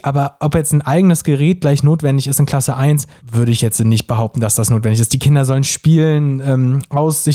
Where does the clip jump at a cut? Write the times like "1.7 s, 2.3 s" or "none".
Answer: none